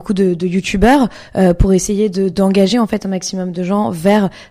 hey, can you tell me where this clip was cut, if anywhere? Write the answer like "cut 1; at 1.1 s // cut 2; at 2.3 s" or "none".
none

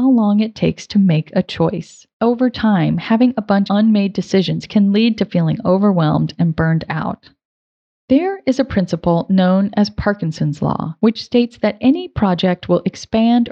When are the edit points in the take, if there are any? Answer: cut 1; at 2.1 s // cut 2; at 3.7 s // cut 3; at 11.0 s

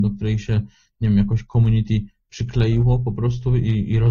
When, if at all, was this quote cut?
none

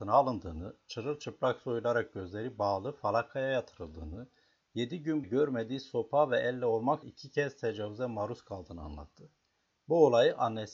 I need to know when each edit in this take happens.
cut 1; at 5.2 s // cut 2; at 7.0 s

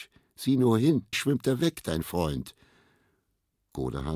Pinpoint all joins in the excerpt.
cut 1; at 1.1 s // cut 2; at 2.0 s

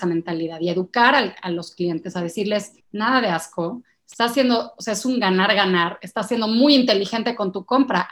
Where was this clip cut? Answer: cut 1; at 2.8 s

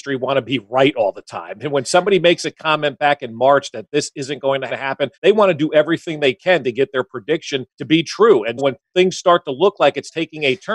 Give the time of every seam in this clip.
cut 1; at 4.7 s // cut 2; at 5.1 s // cut 3; at 7.7 s // cut 4; at 8.6 s

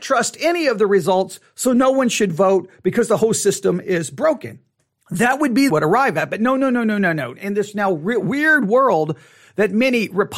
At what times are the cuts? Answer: cut 1; at 4.8 s // cut 2; at 5.7 s

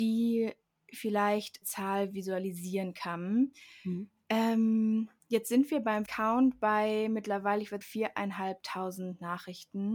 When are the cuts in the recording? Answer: cut 1; at 1.6 s // cut 2; at 6.1 s // cut 3; at 7.8 s

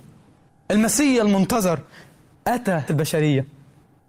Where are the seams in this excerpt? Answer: cut 1; at 2.9 s

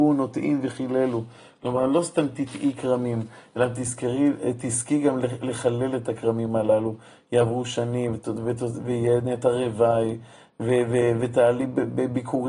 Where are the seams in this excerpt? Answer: none

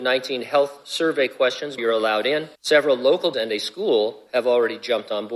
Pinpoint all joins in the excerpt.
cut 1; at 1.8 s // cut 2; at 2.5 s // cut 3; at 3.3 s

